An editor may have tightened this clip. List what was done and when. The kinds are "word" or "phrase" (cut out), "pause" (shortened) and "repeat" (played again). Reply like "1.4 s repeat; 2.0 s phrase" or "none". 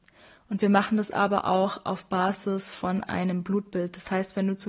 none